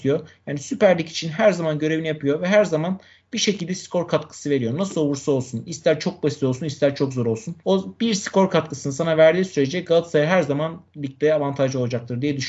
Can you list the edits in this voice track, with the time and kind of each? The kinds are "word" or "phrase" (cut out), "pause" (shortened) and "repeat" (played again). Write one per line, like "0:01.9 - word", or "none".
0:07.6 - pause